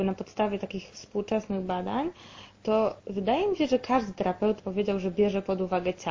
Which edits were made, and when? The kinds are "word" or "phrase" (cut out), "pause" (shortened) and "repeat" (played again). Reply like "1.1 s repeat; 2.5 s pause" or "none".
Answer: 3.0 s pause; 4.6 s word